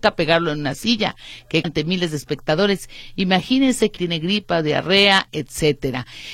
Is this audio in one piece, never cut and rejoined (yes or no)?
no